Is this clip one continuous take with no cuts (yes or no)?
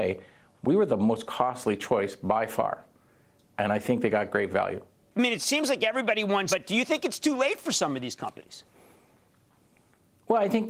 no